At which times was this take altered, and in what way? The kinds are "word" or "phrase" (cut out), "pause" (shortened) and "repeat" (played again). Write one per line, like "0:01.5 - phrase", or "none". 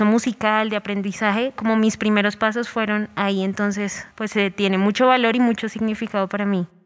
0:04.1 - pause